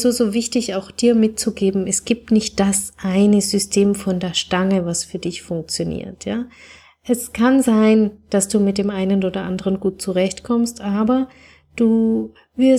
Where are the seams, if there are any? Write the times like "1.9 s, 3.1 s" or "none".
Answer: none